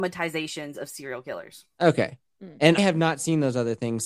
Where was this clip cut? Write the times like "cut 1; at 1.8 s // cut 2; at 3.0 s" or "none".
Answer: cut 1; at 2.8 s